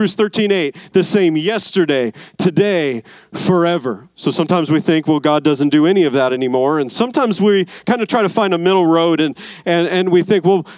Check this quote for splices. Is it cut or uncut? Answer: cut